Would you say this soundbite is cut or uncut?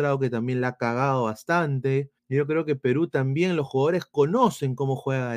cut